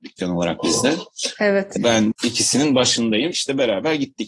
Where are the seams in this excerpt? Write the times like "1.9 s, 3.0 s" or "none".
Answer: 1.8 s, 2.1 s, 3.3 s